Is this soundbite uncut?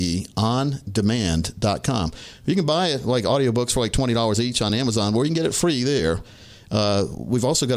yes; 0 cuts

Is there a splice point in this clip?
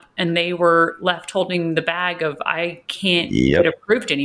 no; 0 cuts

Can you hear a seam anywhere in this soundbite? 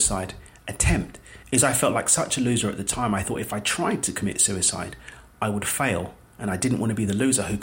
yes; 1 cut; at 1.4 s

